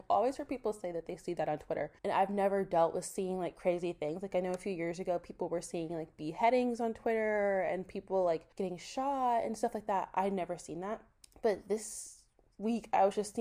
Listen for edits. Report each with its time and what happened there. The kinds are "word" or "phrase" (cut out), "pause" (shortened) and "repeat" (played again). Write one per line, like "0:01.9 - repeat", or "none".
0:02.0 - pause
0:08.5 - pause
0:11.2 - pause